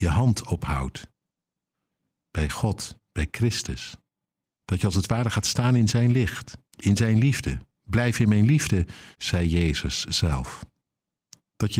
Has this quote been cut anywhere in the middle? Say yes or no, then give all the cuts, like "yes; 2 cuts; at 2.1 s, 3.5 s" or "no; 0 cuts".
yes; 2 cuts; at 6.6 s, 9.1 s